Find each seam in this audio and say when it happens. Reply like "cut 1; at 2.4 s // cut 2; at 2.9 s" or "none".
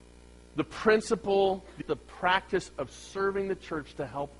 cut 1; at 1.8 s